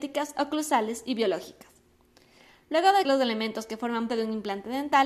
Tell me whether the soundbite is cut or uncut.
cut